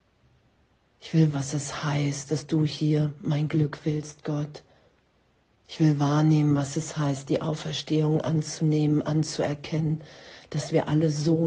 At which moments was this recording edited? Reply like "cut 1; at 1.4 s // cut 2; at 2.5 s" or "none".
cut 1; at 1.3 s